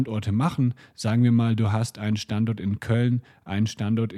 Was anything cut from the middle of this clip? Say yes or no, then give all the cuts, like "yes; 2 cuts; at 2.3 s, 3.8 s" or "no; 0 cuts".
no; 0 cuts